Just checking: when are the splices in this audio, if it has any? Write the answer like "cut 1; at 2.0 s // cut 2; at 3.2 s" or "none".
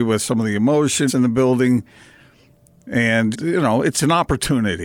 cut 1; at 1.1 s // cut 2; at 3.3 s // cut 3; at 3.9 s